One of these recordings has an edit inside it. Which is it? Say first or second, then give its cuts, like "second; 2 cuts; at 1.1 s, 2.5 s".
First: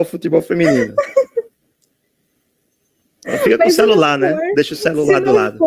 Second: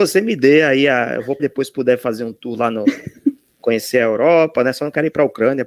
second; 1 cut; at 1.4 s